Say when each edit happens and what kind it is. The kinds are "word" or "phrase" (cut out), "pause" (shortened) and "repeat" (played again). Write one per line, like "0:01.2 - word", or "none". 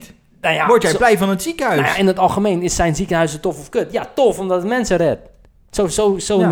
none

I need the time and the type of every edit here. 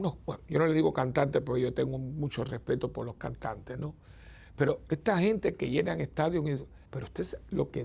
0:06.9 - pause

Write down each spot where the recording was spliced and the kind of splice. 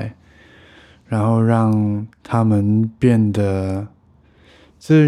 0:02.1 - pause

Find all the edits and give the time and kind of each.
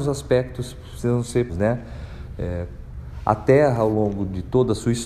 0:01.5 - word

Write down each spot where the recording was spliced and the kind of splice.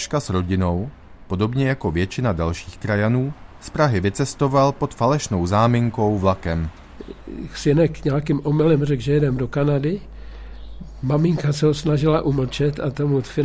none

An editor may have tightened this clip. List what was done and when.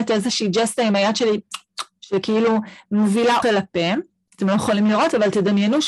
0:03.4 - word

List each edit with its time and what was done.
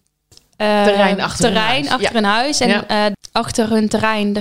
none

